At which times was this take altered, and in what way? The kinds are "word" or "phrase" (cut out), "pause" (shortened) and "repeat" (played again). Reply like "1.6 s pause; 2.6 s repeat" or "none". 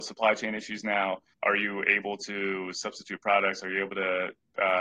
1.3 s word